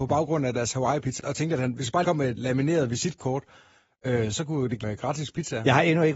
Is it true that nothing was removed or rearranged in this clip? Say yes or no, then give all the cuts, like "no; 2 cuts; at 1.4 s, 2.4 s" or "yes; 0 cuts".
no; 4 cuts; at 1.2 s, 2.0 s, 2.4 s, 4.8 s